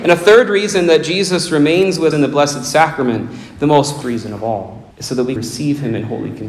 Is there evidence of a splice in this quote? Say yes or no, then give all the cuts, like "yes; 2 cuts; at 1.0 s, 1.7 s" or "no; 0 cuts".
yes; 4 cuts; at 2.1 s, 4.0 s, 4.9 s, 5.4 s